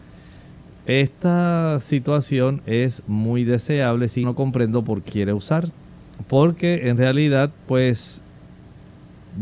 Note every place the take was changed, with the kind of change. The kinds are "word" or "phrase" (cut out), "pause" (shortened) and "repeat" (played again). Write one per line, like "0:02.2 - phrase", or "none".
0:04.2 - phrase
0:05.1 - word